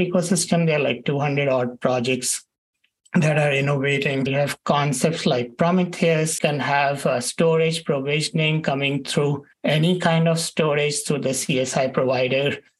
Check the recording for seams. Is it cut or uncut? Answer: cut